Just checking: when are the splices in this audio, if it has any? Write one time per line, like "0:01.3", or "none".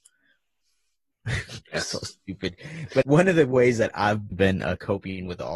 0:03.0
0:04.3